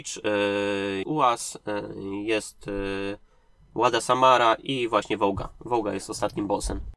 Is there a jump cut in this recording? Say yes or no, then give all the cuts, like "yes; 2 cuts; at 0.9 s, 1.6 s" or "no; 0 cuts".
yes; 1 cut; at 1.0 s